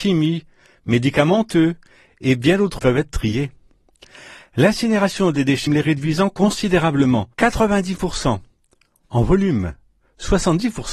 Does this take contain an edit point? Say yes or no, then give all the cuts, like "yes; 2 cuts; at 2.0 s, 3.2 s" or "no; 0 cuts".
yes; 3 cuts; at 2.8 s, 5.7 s, 7.3 s